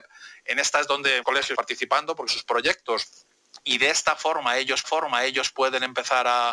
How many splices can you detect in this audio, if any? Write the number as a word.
four